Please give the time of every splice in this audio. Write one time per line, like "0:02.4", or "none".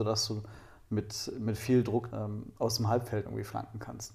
0:02.1
0:02.6
0:03.2